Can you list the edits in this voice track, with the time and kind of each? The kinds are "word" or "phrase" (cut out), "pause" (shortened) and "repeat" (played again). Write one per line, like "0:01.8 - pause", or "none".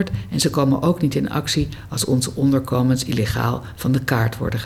none